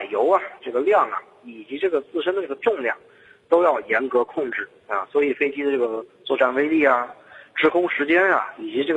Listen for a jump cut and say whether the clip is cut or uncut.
uncut